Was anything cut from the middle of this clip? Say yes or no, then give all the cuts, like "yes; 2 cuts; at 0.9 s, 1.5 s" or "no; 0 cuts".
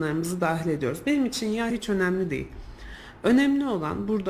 yes; 1 cut; at 1.7 s